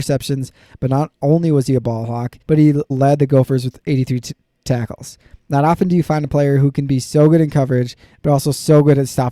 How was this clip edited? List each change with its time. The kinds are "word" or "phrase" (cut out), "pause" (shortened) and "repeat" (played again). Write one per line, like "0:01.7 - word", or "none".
0:02.4 - pause
0:02.9 - word